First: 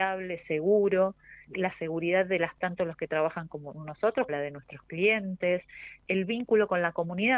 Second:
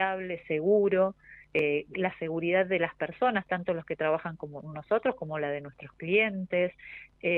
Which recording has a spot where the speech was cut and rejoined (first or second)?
first